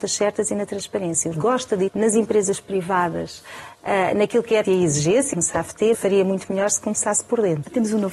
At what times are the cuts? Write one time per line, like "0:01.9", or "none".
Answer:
0:01.3
0:01.9
0:04.6
0:05.3
0:05.9